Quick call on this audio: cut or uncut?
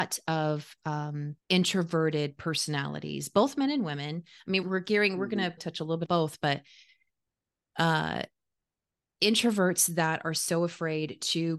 cut